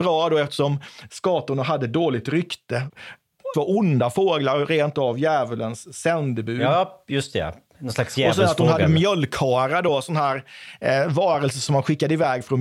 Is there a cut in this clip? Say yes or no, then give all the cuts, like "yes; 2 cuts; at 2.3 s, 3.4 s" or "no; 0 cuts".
yes; 1 cut; at 3.5 s